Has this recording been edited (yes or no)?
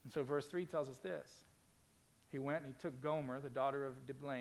no